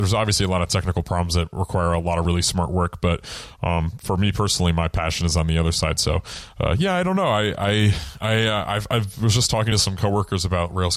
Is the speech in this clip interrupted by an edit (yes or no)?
no